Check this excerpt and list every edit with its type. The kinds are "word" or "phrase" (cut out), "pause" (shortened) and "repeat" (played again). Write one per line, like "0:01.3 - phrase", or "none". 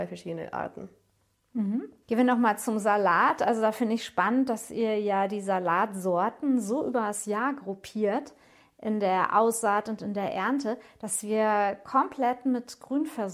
none